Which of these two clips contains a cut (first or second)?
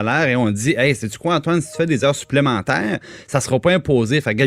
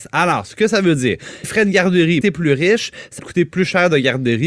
second